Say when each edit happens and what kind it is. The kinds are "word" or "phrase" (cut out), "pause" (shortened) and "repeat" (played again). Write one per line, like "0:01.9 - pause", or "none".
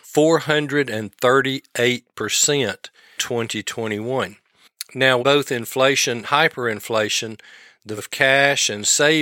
0:03.2 - word
0:05.2 - word
0:06.2 - word
0:08.0 - word